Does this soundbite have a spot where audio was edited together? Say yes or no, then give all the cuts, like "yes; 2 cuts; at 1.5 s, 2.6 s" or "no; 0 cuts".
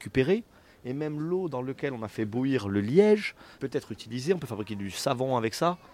no; 0 cuts